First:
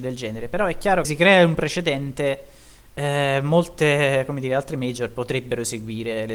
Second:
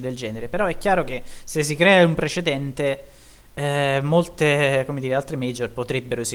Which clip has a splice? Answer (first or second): first